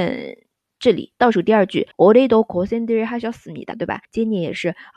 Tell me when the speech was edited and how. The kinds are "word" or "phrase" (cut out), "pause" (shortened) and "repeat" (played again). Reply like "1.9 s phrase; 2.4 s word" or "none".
1.9 s pause; 3.7 s phrase; 4.0 s pause